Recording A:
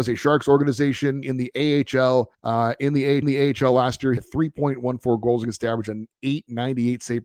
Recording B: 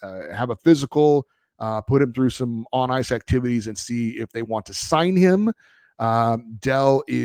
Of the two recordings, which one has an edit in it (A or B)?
A